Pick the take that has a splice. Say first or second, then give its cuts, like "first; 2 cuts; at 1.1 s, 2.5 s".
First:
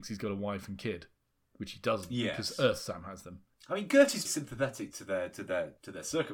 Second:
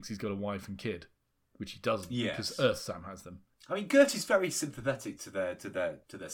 first; 1 cut; at 4.3 s